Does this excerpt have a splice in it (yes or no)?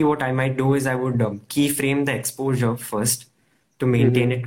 no